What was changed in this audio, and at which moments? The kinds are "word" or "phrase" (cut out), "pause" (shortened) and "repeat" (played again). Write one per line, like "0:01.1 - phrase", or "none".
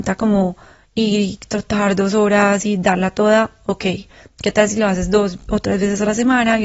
none